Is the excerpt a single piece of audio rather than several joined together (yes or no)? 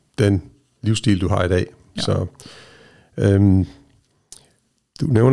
yes